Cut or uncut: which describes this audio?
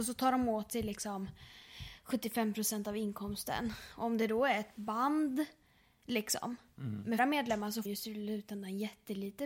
cut